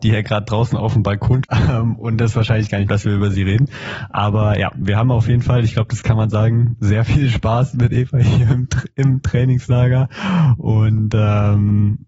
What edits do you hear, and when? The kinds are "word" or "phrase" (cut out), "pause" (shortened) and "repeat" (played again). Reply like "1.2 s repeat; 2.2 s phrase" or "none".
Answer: 1.4 s word; 2.9 s word